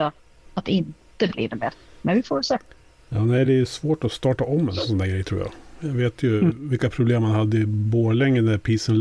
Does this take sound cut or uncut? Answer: uncut